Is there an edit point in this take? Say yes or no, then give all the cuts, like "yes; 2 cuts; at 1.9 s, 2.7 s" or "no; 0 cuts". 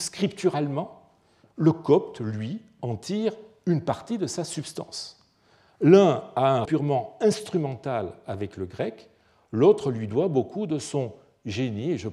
yes; 1 cut; at 6.7 s